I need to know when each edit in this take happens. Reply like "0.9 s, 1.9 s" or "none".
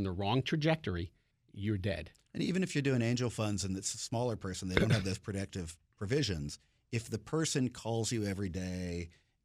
none